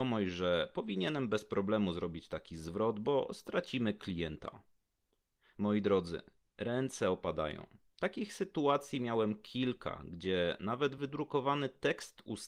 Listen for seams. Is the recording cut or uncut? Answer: uncut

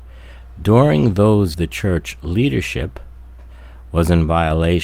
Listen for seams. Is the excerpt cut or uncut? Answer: cut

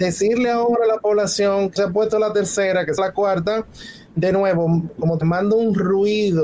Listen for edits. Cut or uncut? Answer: cut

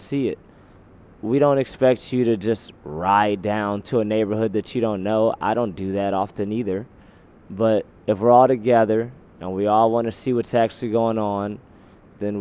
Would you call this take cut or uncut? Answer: uncut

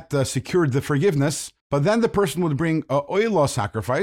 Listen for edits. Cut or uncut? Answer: cut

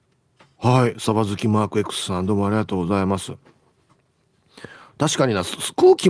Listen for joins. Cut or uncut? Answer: uncut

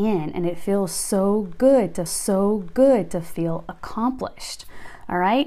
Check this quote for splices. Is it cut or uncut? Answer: cut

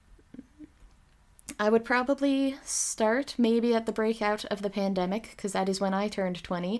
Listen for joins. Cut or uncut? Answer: uncut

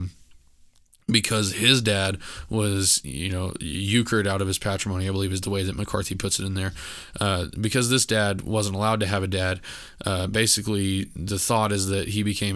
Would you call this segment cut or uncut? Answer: uncut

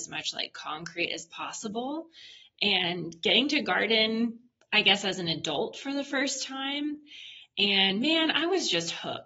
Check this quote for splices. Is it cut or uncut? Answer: uncut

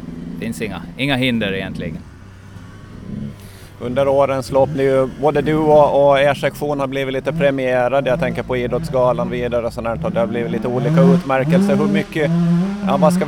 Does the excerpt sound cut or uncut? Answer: cut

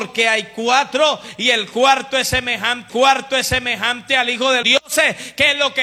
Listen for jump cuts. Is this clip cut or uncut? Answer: cut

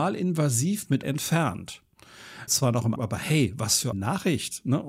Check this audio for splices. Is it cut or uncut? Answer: cut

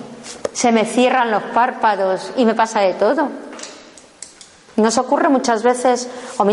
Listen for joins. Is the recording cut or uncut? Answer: uncut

